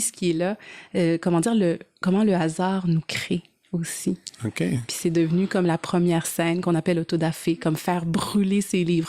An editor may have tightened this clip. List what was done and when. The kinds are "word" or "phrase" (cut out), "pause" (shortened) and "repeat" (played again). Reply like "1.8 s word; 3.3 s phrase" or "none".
none

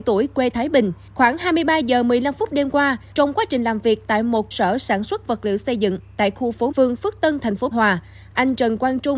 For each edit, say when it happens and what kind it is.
4.5 s word; 6.7 s word; 7.7 s word

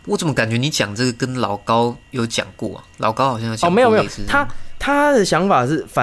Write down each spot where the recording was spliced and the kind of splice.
2.0 s pause

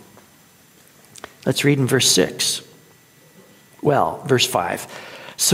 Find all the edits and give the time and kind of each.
none

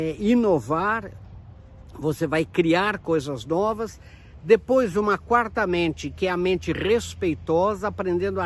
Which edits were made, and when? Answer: none

